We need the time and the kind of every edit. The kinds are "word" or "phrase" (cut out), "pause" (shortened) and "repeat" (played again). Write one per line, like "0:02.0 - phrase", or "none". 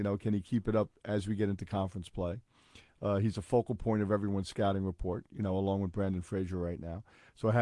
none